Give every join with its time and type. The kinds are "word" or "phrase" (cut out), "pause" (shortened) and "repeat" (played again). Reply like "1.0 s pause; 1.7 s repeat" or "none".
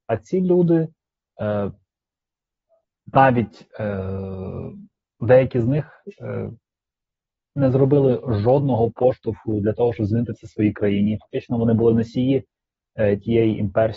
none